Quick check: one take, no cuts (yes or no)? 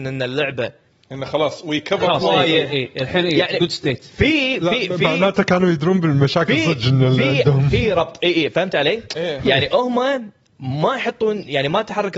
yes